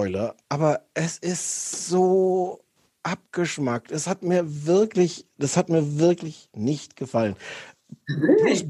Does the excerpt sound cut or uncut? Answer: uncut